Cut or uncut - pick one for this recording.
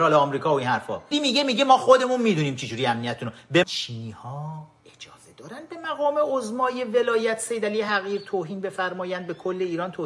cut